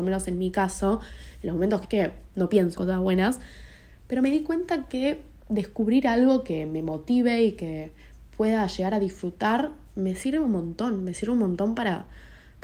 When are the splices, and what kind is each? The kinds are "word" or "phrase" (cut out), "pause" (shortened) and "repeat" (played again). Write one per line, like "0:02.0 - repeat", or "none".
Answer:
0:01.8 - phrase
0:02.7 - word